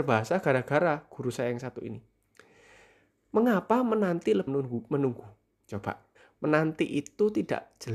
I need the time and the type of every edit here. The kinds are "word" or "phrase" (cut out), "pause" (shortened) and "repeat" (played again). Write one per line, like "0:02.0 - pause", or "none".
0:04.5 - phrase
0:06.2 - pause